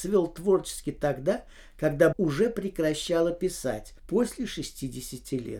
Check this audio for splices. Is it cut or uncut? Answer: cut